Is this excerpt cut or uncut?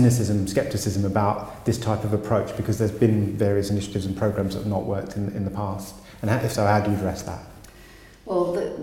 uncut